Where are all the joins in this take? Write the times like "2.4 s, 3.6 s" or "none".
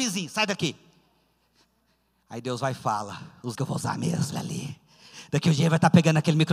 3.6 s, 4.3 s